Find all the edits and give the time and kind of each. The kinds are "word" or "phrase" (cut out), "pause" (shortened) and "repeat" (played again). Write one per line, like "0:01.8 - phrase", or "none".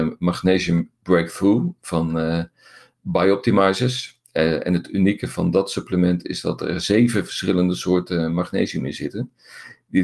none